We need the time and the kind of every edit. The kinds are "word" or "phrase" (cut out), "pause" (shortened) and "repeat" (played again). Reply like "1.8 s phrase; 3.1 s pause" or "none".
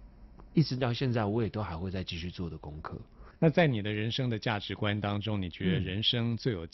3.4 s pause